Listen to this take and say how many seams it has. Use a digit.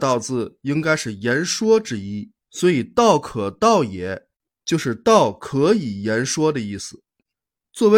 1